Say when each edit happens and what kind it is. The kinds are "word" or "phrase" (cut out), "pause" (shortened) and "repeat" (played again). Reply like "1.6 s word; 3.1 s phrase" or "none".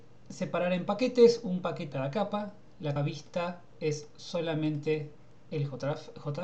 1.9 s word; 3.0 s word